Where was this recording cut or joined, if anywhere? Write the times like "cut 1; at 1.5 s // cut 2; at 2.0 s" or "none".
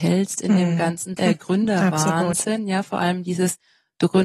cut 1; at 1.2 s